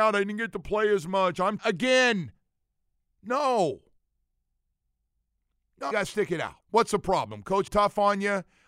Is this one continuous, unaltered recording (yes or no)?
no